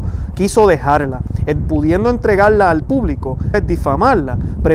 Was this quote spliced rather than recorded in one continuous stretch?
yes; 3 cuts; at 1.6 s, 2.8 s, 3.5 s

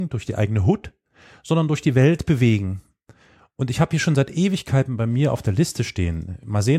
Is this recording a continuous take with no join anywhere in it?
yes; 0 cuts

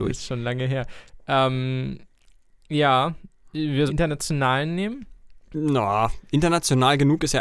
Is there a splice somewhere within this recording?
yes; 2 cuts; at 3.9 s, 5.4 s

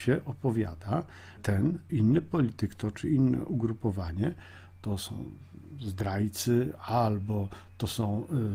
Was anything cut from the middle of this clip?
yes; 2 cuts; at 1.4 s, 1.9 s

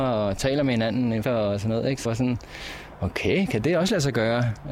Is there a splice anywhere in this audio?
yes; 2 cuts; at 1.2 s, 2.0 s

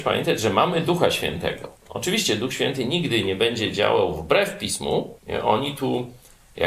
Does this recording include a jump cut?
yes; 2 cuts; at 1.8 s, 5.2 s

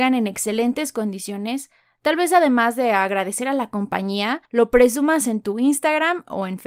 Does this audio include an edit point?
yes; 1 cut; at 4.4 s

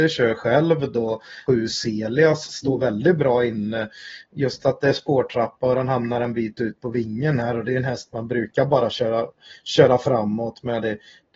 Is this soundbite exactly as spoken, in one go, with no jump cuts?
no; 1 cut; at 1.5 s

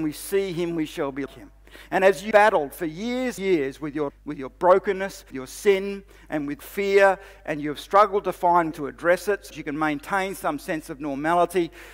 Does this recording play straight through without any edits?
no; 8 cuts; at 1.3 s, 2.3 s, 3.4 s, 4.1 s, 5.3 s, 6.6 s, 8.7 s, 9.5 s

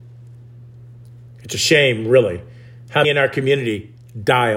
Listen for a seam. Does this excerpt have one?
yes; 1 cut; at 3.0 s

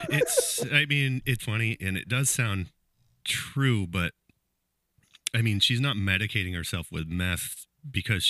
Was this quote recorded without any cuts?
no; 1 cut; at 1.4 s

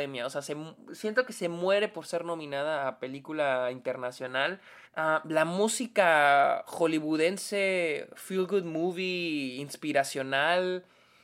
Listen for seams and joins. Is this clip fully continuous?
no; 1 cut; at 4.9 s

